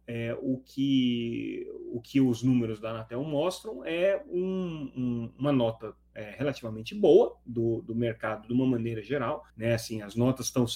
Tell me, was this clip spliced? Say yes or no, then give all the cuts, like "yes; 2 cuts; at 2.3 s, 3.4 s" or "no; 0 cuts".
yes; 1 cut; at 9.5 s